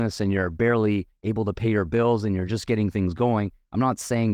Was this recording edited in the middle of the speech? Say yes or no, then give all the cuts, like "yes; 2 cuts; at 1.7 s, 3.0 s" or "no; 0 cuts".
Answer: no; 0 cuts